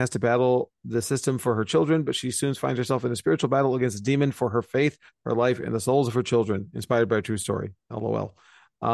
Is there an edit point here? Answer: no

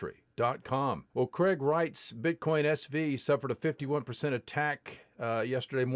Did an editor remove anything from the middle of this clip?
yes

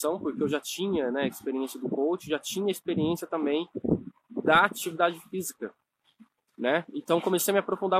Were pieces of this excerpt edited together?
no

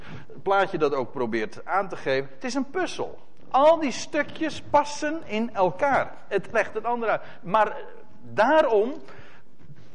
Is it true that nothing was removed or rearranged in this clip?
no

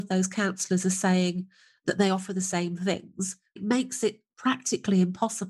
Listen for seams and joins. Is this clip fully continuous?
no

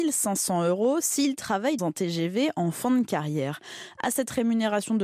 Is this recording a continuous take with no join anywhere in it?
no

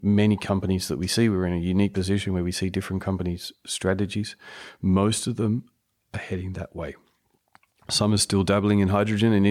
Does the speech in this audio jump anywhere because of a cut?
no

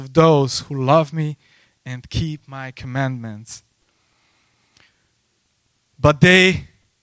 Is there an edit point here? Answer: no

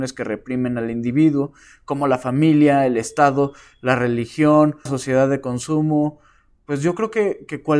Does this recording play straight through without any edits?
no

